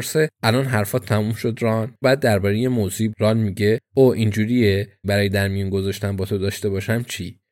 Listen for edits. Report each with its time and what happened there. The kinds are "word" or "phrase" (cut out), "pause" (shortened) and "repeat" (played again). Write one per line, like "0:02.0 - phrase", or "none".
0:02.0 - word
0:03.1 - phrase
0:05.0 - phrase